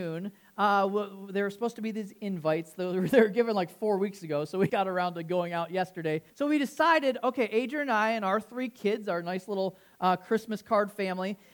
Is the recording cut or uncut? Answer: cut